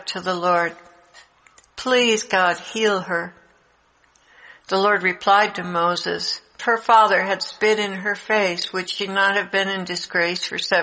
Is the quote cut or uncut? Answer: cut